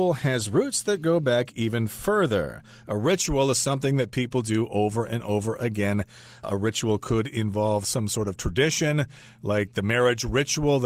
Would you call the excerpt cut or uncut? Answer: uncut